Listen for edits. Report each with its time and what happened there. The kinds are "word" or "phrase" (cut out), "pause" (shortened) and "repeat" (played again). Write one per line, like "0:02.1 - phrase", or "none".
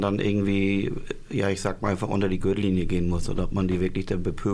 none